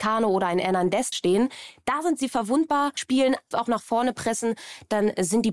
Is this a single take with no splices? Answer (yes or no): no